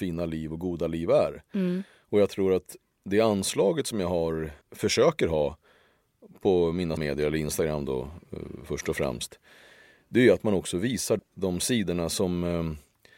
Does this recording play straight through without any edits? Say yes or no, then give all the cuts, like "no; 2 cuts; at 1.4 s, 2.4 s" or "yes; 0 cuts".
no; 3 cuts; at 4.6 s, 7.0 s, 11.2 s